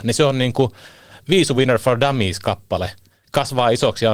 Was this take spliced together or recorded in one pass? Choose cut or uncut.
uncut